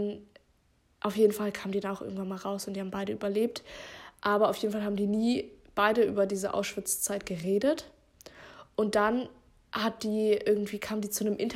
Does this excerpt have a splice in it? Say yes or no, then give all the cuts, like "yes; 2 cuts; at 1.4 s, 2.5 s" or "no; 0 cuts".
no; 0 cuts